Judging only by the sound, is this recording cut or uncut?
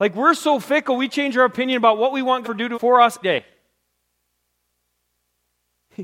cut